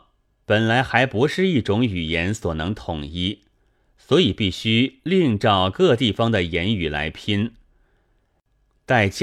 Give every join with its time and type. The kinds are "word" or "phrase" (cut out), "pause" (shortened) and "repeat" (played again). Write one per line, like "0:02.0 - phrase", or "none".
none